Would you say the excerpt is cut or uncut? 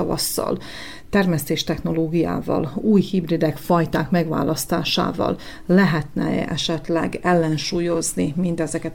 uncut